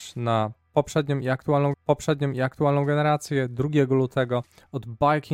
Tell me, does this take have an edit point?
yes; 1 cut; at 1.7 s

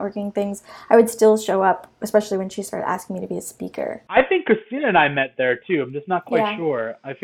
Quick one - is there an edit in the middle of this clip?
no; 0 cuts

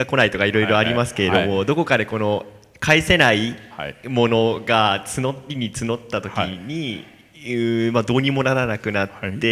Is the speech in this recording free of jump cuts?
yes; 0 cuts

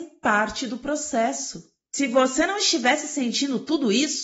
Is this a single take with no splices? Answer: yes; 0 cuts

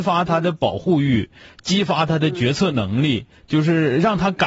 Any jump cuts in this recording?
no; 0 cuts

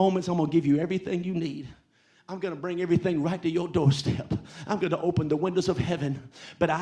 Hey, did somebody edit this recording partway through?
no; 0 cuts

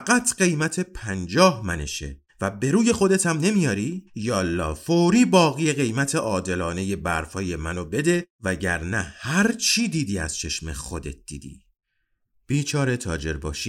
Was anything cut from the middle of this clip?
yes; 1 cut; at 4.1 s

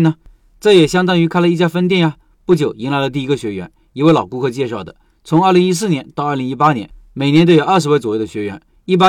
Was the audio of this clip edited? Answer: no; 0 cuts

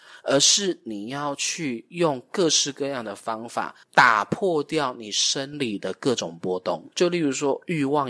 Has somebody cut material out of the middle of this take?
yes; 2 cuts; at 3.8 s, 6.9 s

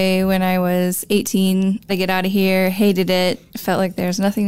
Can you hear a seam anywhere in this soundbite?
yes; 1 cut; at 1.9 s

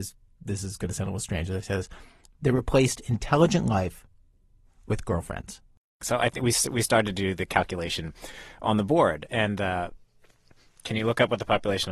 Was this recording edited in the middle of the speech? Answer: no; 0 cuts

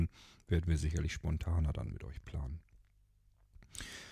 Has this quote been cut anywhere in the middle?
no; 0 cuts

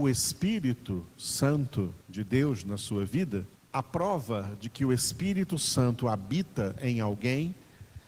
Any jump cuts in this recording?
yes; 2 cuts; at 2.0 s, 3.5 s

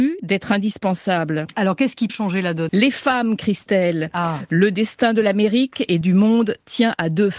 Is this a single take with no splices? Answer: no; 3 cuts; at 2.1 s, 2.7 s, 6.0 s

